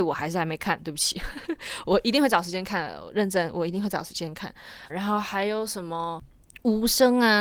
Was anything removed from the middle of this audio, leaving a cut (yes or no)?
yes